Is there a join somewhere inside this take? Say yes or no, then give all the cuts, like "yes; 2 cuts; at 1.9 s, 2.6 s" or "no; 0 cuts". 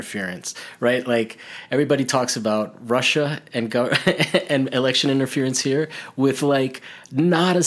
no; 0 cuts